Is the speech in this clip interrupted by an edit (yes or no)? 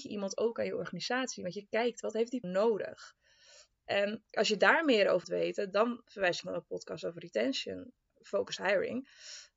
yes